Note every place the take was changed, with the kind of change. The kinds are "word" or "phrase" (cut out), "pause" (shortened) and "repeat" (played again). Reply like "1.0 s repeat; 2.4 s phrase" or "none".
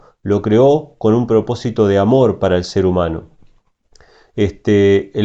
none